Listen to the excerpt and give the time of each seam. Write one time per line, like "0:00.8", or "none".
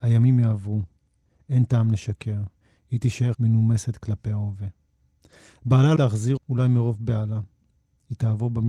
0:03.3
0:06.0
0:06.4

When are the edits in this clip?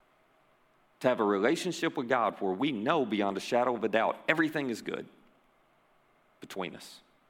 none

